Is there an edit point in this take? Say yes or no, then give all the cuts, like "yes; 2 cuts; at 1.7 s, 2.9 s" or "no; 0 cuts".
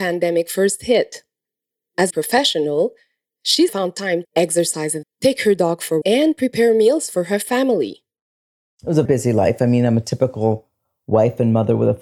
yes; 6 cuts; at 2.1 s, 3.7 s, 4.2 s, 5.0 s, 6.0 s, 9.0 s